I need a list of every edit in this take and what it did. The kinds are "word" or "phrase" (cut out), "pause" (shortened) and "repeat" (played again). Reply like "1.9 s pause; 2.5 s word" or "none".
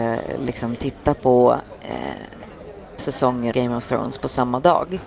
3.0 s word; 3.5 s word